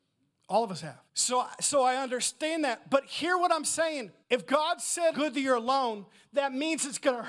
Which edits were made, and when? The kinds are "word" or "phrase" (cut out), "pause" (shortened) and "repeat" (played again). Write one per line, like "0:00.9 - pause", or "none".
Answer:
0:01.1 - pause
0:04.2 - pause
0:05.1 - phrase